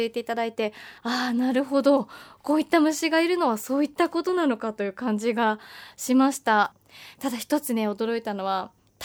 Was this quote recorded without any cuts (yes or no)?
no